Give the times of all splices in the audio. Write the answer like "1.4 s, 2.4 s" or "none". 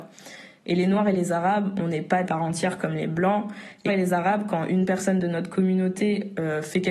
2.2 s, 3.9 s